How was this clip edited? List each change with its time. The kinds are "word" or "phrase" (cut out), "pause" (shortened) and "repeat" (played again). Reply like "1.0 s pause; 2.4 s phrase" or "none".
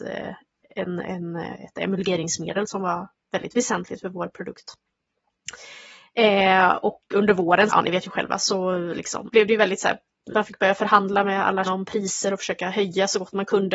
7.7 s word; 9.3 s word; 10.3 s word; 11.6 s word